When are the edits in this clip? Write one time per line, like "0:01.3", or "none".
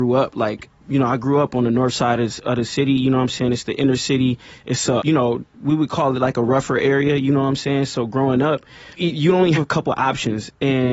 0:05.0
0:09.0
0:09.5